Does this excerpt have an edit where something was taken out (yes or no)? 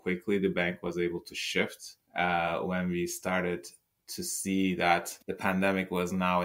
yes